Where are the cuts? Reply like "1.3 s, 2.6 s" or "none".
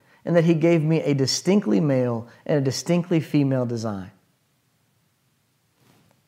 none